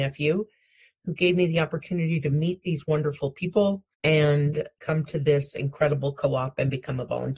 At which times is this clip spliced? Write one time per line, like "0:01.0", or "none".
0:03.9